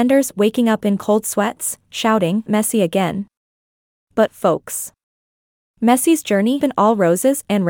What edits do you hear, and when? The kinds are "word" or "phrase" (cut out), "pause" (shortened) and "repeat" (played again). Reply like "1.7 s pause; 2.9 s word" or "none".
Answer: 2.5 s word; 4.3 s phrase; 6.6 s word